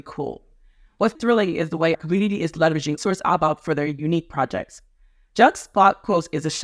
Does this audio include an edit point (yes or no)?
yes